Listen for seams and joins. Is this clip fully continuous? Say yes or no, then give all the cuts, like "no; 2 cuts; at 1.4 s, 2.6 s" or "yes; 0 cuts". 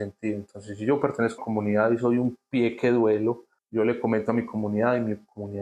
no; 2 cuts; at 1.4 s, 3.6 s